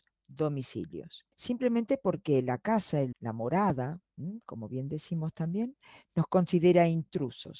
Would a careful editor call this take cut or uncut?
cut